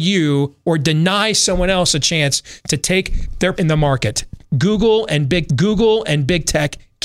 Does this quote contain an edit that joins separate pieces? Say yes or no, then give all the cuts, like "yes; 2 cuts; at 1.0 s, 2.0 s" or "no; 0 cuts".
yes; 2 cuts; at 3.6 s, 5.5 s